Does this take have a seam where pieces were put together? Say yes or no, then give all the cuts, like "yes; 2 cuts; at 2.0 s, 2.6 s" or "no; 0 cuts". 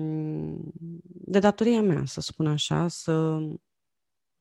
no; 0 cuts